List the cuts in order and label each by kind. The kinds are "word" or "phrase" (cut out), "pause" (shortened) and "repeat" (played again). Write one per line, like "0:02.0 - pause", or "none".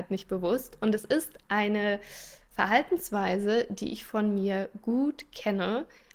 none